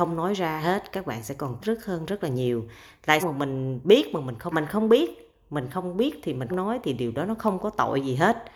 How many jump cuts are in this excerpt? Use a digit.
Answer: 4